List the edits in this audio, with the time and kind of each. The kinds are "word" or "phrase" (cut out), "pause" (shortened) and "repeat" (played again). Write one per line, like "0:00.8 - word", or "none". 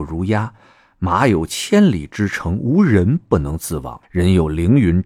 0:04.0 - pause